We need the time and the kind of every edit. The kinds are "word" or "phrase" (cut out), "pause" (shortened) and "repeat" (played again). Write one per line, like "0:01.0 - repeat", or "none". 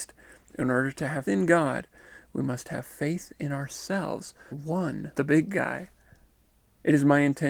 0:01.2 - word
0:04.5 - phrase
0:05.1 - word